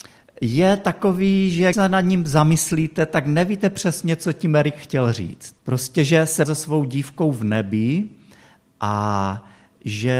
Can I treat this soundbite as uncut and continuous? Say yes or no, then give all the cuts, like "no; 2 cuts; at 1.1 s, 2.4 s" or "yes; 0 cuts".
no; 3 cuts; at 1.7 s, 5.6 s, 6.4 s